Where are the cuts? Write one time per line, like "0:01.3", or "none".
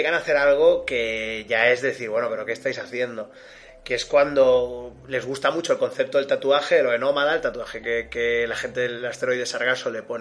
none